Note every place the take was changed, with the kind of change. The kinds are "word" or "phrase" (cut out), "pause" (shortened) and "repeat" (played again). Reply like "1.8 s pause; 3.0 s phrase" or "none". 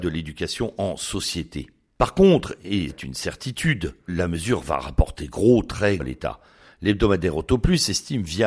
2.9 s word; 4.1 s word; 6.0 s word